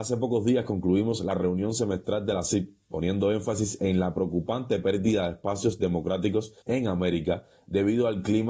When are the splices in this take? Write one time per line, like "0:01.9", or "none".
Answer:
0:06.6